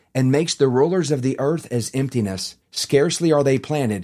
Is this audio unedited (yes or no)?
no